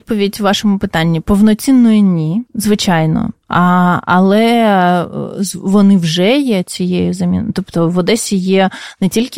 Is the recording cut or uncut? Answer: cut